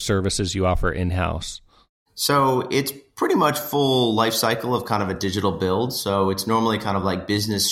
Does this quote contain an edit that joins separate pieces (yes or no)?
no